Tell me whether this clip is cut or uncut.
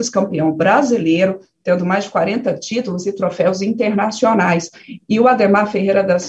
uncut